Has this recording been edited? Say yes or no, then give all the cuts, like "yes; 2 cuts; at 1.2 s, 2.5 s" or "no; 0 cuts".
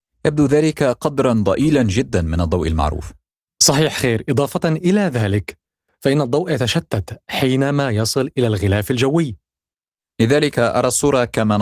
no; 0 cuts